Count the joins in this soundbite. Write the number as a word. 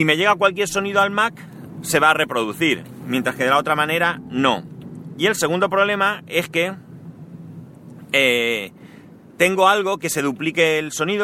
one